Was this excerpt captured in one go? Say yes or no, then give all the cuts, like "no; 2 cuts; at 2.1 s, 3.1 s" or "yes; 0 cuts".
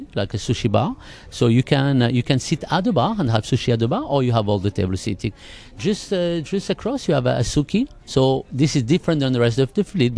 no; 1 cut; at 8.0 s